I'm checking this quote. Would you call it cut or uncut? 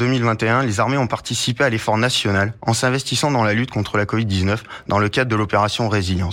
uncut